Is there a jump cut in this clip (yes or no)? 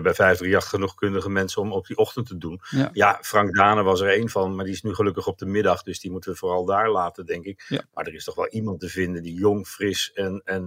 no